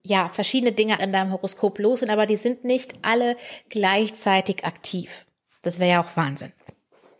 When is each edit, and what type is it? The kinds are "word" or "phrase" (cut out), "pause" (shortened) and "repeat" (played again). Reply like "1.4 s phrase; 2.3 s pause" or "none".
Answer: 1.0 s word

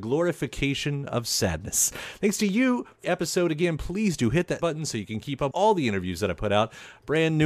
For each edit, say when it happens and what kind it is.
3.0 s phrase; 4.6 s word; 5.5 s word

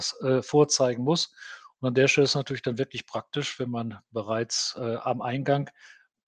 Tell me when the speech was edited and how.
none

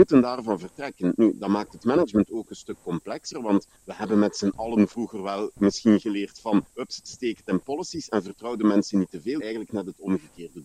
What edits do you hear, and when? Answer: 3.8 s pause; 6.7 s pause; 9.4 s phrase

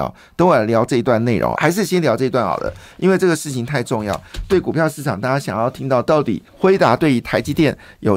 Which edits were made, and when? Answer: 1.6 s word; 6.5 s pause

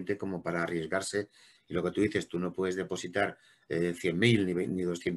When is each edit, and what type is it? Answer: none

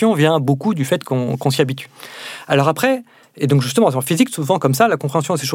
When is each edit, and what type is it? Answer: none

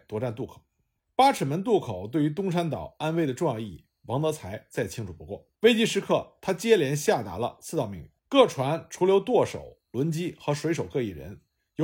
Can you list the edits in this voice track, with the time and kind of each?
1.0 s pause; 5.6 s pause; 8.2 s pause

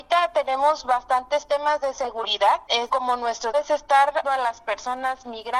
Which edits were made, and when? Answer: 2.9 s word; 3.5 s word; 4.2 s word

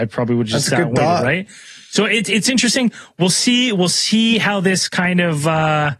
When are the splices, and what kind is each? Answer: none

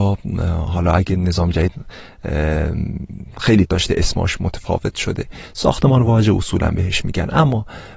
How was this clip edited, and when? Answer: 3.7 s word

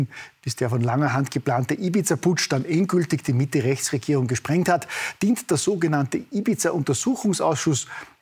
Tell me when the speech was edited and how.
none

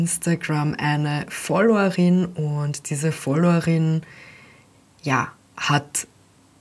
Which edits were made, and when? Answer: none

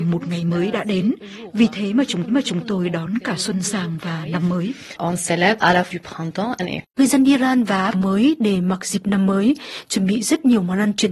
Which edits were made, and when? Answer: 2.3 s repeat; 5.6 s word; 5.9 s word; 6.6 s phrase; 7.9 s phrase

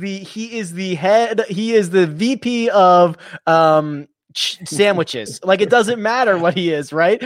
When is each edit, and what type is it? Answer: none

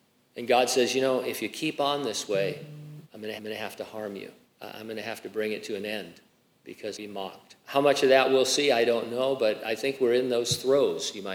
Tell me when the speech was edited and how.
3.0 s pause; 3.4 s repeat; 4.4 s pause; 6.9 s phrase; 7.6 s pause

